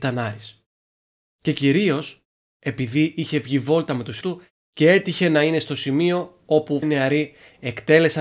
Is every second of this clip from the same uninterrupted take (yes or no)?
no